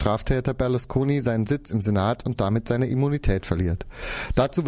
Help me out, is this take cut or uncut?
uncut